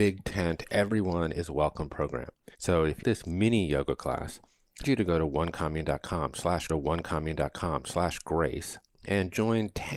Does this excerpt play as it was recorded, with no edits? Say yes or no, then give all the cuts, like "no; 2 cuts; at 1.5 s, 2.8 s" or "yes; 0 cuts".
no; 4 cuts; at 2.5 s, 3.0 s, 4.8 s, 6.7 s